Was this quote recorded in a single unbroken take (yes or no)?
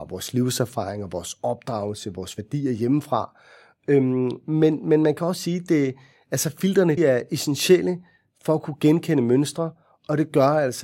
no